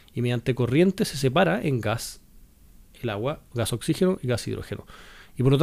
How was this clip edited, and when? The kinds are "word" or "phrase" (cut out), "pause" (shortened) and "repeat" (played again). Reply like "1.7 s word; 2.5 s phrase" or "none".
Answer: none